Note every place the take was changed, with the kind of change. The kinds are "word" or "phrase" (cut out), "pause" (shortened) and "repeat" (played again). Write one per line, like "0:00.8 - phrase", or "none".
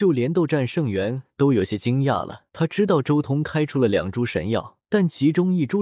0:02.5 - pause
0:04.8 - pause